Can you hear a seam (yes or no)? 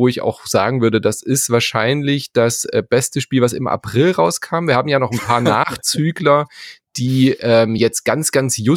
no